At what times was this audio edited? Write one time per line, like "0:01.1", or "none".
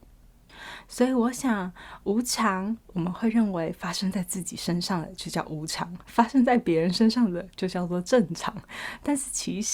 0:06.0